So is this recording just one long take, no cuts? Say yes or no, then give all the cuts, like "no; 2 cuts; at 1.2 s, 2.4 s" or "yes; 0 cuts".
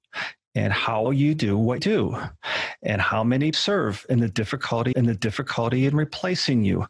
no; 4 cuts; at 1.1 s, 1.8 s, 3.5 s, 4.9 s